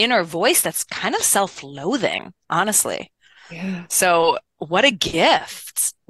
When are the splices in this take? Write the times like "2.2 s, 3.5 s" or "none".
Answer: none